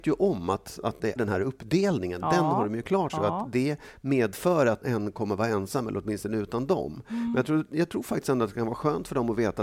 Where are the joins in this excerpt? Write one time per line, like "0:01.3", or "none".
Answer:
0:01.2
0:03.1
0:04.8